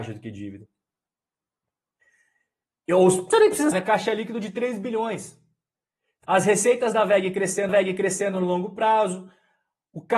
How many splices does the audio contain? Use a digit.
3